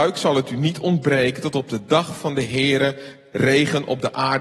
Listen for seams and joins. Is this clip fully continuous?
yes; 0 cuts

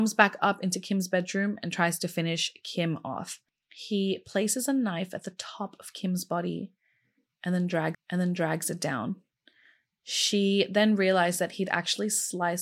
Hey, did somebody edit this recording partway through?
yes; 1 cut; at 7.9 s

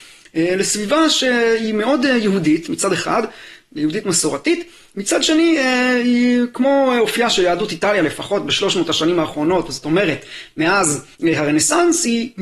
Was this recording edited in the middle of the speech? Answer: yes; 1 cut; at 11.1 s

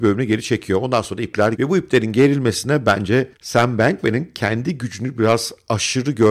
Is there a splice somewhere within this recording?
yes; 1 cut; at 1.5 s

